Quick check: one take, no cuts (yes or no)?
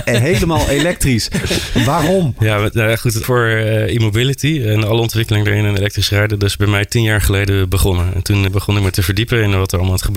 no